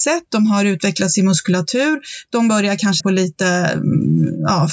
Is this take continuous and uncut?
no; 1 cut; at 3.0 s

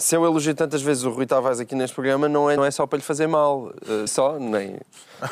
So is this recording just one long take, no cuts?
no; 2 cuts; at 2.6 s, 4.1 s

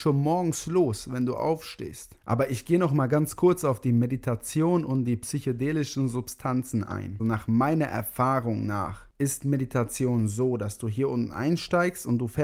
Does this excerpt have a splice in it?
no; 0 cuts

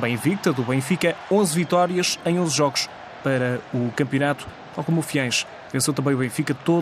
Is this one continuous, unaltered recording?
yes; 0 cuts

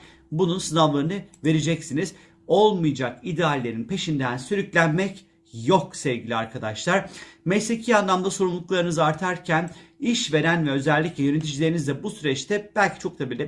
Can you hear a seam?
no; 0 cuts

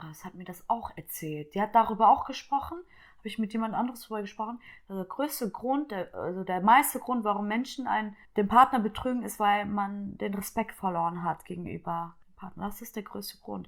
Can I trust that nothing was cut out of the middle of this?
no; 2 cuts; at 8.2 s, 12.2 s

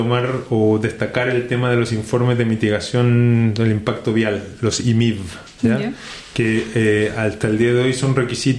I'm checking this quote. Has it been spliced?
no; 0 cuts

